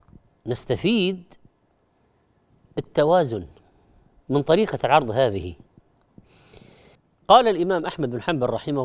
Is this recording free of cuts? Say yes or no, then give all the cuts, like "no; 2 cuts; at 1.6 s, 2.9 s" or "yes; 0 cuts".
yes; 0 cuts